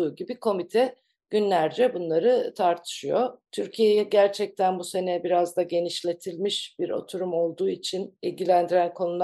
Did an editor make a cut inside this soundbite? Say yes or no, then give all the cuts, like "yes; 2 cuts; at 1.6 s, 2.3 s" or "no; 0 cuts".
no; 0 cuts